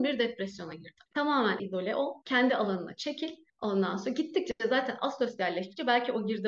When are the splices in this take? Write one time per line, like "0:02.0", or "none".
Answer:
0:01.6